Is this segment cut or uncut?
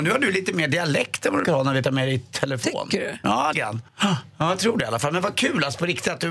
cut